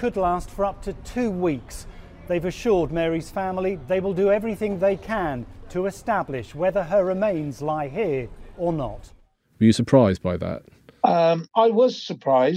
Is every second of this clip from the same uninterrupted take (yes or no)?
yes